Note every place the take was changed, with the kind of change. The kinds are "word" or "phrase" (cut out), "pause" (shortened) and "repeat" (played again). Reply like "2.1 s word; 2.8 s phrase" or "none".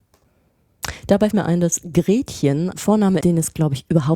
1.3 s word; 2.7 s word; 3.2 s word